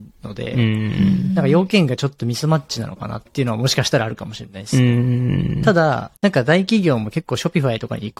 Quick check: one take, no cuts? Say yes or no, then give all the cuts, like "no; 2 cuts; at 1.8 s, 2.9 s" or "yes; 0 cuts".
no; 1 cut; at 6.2 s